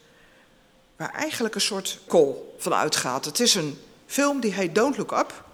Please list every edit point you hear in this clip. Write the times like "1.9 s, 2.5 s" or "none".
2.1 s